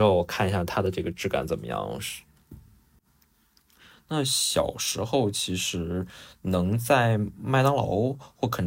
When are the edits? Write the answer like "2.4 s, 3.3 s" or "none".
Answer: none

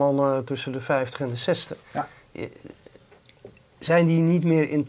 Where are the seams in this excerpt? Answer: 1.8 s

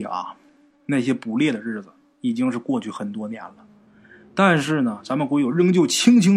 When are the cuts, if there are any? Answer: none

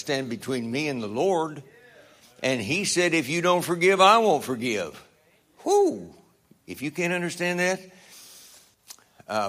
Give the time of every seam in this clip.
none

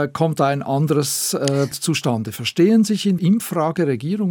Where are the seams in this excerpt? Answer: 1.7 s, 3.2 s

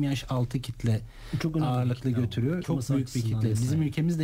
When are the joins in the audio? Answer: 2.6 s

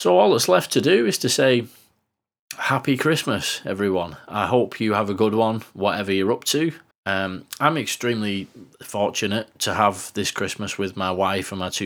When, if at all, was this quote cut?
6.9 s

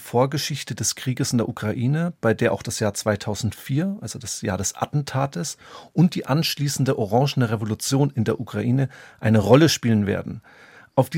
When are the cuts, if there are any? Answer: none

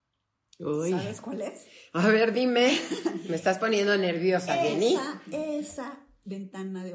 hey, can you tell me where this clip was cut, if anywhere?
none

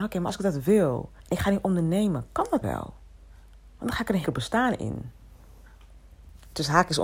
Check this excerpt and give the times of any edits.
1.2 s, 2.6 s, 4.2 s

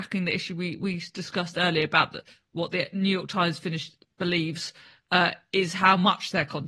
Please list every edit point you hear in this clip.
none

